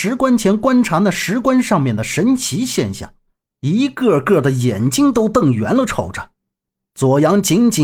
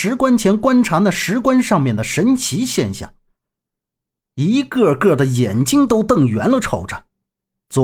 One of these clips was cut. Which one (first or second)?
first